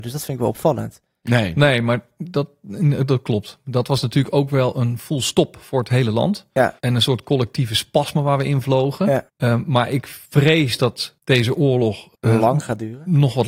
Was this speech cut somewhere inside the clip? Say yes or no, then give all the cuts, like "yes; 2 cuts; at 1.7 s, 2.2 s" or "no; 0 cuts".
yes; 5 cuts; at 6.8 s, 9.3 s, 10.3 s, 11.2 s, 12.1 s